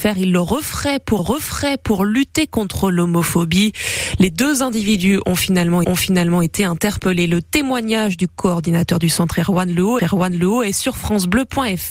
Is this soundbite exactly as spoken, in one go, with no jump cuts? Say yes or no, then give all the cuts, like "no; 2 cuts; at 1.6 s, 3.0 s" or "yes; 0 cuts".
no; 3 cuts; at 1.2 s, 5.8 s, 10.0 s